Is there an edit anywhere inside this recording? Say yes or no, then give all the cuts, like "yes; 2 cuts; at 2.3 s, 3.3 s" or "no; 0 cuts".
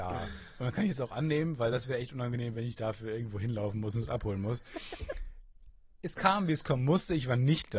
no; 0 cuts